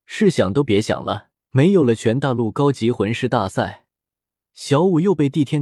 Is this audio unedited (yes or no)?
no